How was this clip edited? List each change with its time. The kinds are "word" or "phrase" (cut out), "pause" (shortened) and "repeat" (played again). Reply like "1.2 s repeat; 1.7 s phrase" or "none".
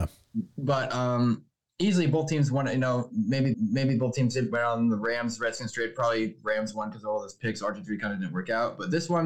1.6 s pause; 3.5 s repeat

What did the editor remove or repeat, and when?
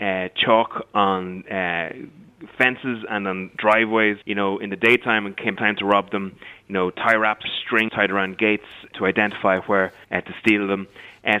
4.2 s pause; 5.6 s phrase; 7.4 s word; 7.9 s word; 8.9 s word; 10.0 s pause

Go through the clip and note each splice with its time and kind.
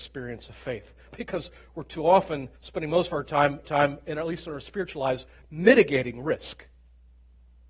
2.5 s pause; 3.6 s repeat

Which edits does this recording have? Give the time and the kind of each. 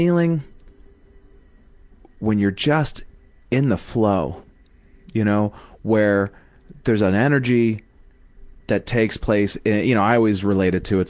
none

